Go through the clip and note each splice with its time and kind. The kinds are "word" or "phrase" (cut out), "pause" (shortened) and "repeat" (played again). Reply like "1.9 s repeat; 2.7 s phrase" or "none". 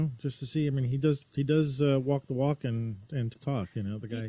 3.3 s word